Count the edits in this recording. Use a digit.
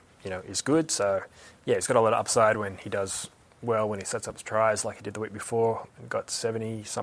0